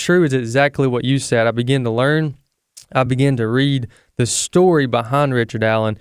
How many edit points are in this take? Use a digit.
0